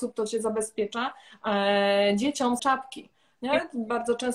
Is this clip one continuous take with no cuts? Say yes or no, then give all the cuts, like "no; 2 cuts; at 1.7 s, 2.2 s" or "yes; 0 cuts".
no; 1 cut; at 2.6 s